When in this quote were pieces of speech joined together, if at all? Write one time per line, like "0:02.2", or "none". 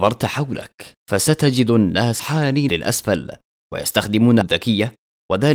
0:01.0
0:02.2
0:02.7
0:04.4